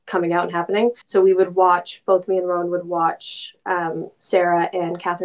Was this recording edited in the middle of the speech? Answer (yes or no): yes